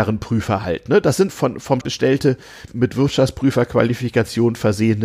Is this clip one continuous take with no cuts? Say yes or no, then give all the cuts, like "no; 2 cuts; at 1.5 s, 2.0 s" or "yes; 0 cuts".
no; 3 cuts; at 1.3 s, 1.8 s, 2.7 s